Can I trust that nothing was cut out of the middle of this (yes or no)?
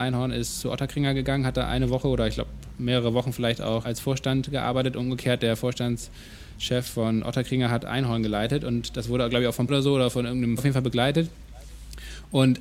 no